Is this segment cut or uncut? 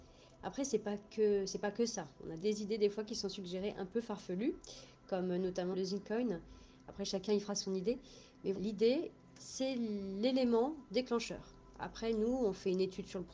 cut